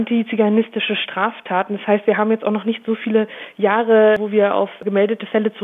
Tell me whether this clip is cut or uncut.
uncut